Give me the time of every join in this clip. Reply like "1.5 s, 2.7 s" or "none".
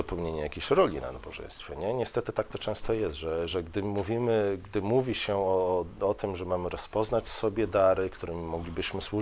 none